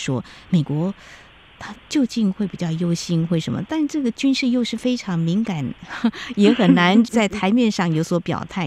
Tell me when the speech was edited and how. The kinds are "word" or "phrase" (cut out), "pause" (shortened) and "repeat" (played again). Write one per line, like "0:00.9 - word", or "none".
0:01.8 - pause

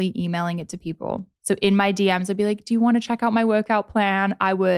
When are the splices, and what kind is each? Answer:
0:01.4 - pause

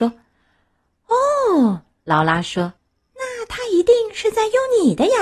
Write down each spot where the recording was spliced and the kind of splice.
0:02.8 - pause

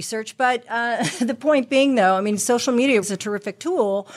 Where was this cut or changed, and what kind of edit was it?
0:03.0 - word

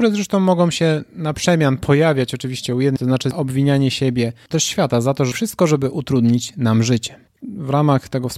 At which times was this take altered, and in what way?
0:03.0 - word
0:04.5 - word
0:05.3 - word
0:07.4 - phrase

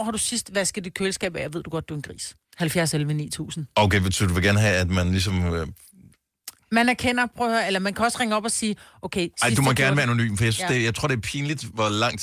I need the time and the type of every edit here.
0:02.4 - pause

